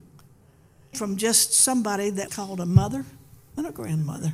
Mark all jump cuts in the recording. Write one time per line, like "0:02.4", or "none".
0:00.9
0:02.3